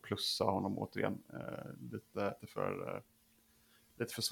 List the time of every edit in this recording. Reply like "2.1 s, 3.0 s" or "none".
2.4 s